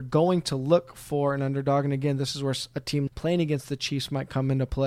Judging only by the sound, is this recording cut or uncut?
cut